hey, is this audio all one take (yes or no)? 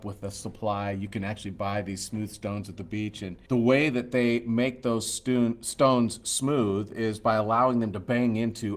no